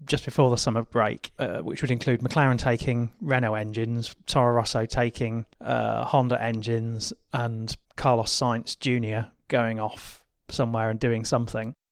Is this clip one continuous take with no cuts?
no; 2 cuts; at 5.5 s, 7.8 s

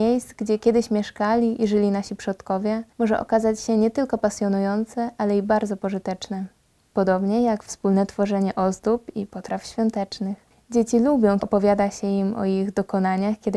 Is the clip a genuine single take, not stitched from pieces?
no; 1 cut; at 11.4 s

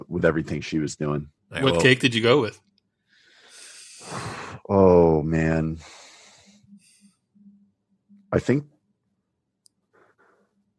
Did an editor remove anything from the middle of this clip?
yes; 1 cut; at 1.4 s

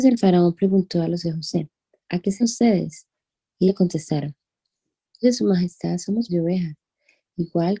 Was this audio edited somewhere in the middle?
yes; 5 cuts; at 1.2 s, 2.4 s, 3.7 s, 5.2 s, 6.3 s

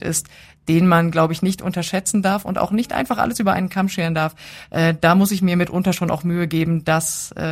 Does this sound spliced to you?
no; 0 cuts

